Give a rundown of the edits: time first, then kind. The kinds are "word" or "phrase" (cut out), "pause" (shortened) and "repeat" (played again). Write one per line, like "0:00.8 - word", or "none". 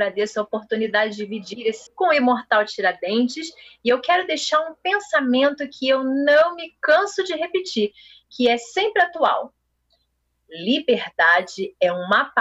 0:01.9 - word